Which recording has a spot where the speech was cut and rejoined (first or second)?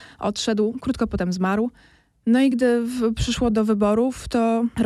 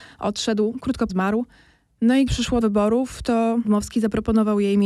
second